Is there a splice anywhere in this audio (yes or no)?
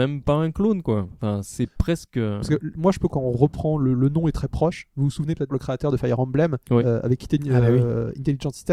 yes